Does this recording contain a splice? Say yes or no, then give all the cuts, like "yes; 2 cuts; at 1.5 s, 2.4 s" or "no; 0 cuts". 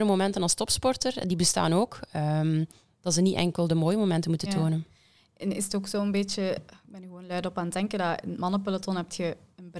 no; 0 cuts